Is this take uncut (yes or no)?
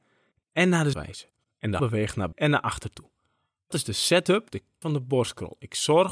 no